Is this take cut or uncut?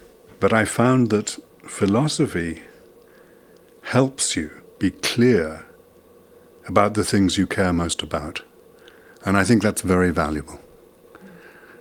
uncut